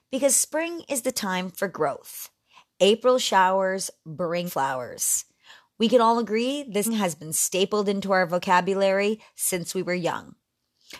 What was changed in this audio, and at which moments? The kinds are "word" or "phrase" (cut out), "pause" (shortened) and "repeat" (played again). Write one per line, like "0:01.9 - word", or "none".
0:04.5 - word
0:06.8 - word